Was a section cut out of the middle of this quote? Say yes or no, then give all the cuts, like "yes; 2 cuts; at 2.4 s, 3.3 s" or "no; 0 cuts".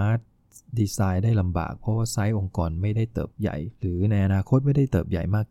yes; 1 cut; at 3.7 s